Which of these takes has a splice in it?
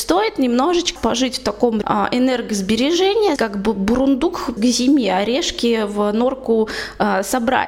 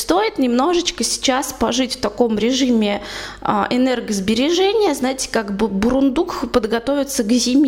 first; 4 cuts; at 1.0 s, 1.8 s, 3.4 s, 4.6 s

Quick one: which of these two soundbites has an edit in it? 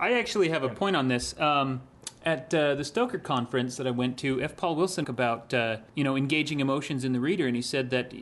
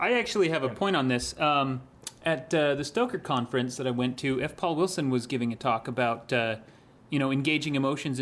first; 2 cuts; at 5.0 s, 5.9 s

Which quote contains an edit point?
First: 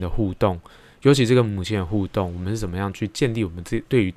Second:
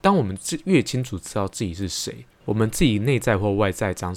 second; 1 cut; at 2.3 s

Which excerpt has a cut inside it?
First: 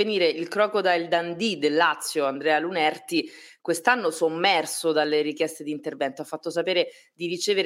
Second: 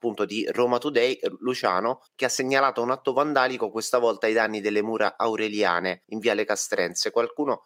second; 2 cuts; at 2.1 s, 6.0 s

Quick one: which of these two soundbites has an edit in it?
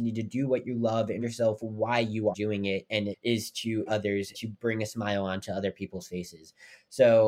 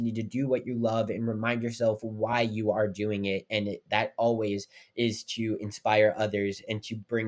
first; 5 cuts; at 1.2 s, 2.3 s, 3.1 s, 3.9 s, 4.3 s

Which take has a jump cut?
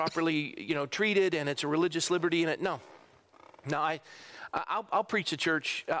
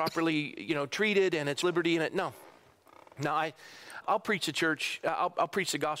second; 2 cuts; at 1.6 s, 4.0 s

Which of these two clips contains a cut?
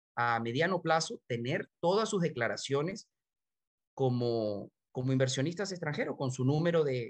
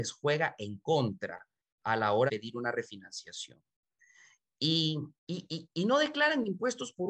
second; 2 cuts; at 2.3 s, 5.2 s

